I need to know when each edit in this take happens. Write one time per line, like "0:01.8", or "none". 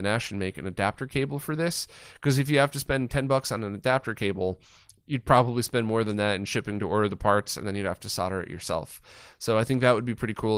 none